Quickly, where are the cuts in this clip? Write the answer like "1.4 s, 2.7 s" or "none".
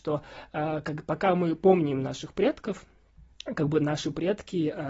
3.3 s